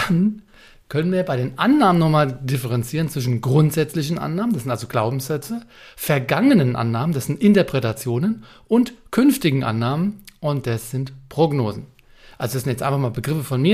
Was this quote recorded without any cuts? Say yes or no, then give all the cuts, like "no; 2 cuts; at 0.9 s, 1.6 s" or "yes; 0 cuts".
yes; 0 cuts